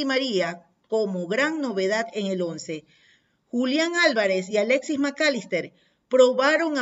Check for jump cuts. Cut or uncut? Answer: uncut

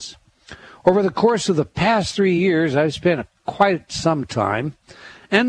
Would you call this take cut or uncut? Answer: uncut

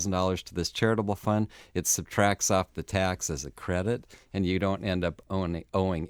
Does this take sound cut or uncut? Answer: uncut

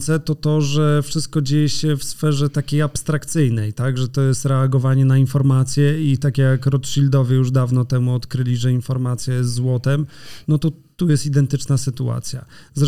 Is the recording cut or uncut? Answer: uncut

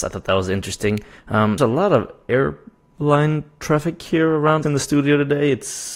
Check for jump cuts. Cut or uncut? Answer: cut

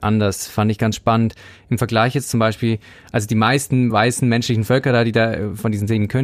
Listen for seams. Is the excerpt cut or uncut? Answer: uncut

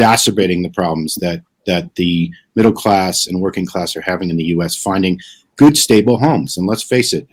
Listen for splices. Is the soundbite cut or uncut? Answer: uncut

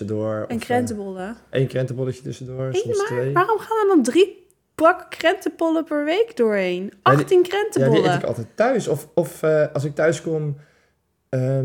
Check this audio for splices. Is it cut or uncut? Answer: uncut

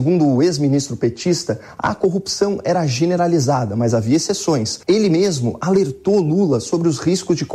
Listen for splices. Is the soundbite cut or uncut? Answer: cut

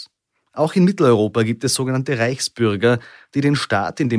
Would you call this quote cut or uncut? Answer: uncut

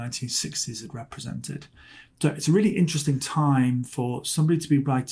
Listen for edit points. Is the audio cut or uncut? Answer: uncut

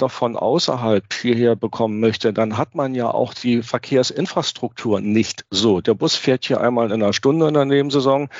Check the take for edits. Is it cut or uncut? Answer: uncut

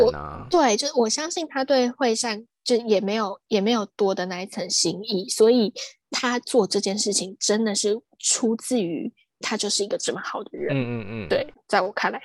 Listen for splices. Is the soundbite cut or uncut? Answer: uncut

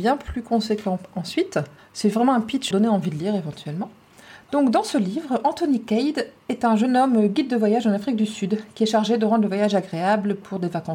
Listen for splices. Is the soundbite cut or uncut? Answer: cut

